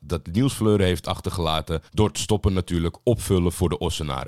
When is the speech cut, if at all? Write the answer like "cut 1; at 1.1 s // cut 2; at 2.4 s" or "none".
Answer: cut 1; at 1.9 s